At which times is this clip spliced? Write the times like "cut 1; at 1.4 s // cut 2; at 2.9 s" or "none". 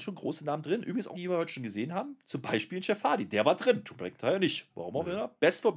cut 1; at 1.1 s